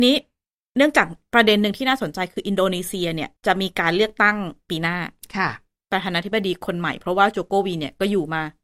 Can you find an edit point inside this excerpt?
yes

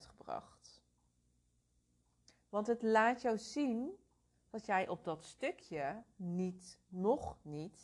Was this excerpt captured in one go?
yes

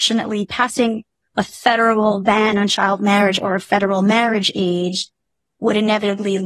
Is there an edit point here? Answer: no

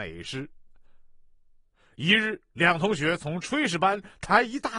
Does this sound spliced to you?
no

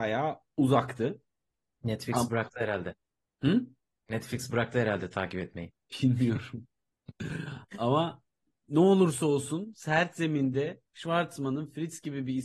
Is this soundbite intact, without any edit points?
yes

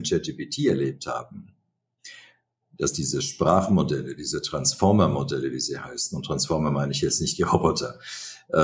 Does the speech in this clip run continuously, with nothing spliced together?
yes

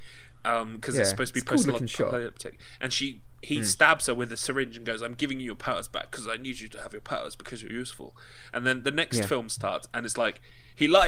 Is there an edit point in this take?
no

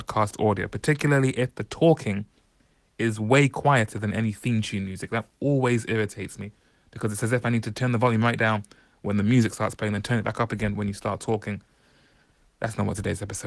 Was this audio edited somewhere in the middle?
no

